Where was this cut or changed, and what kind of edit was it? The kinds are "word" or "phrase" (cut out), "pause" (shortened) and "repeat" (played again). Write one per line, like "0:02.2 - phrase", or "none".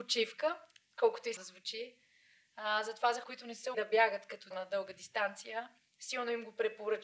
0:01.4 - word
0:03.2 - word
0:03.7 - word
0:04.5 - word